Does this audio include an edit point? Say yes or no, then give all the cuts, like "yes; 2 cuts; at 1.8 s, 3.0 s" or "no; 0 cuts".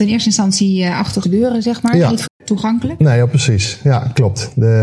yes; 2 cuts; at 1.2 s, 2.3 s